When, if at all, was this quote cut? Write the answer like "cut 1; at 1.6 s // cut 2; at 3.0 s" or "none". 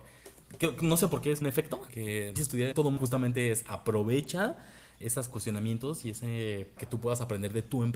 cut 1; at 1.4 s // cut 2; at 1.9 s // cut 3; at 2.4 s // cut 4; at 2.7 s // cut 5; at 5.0 s // cut 6; at 6.8 s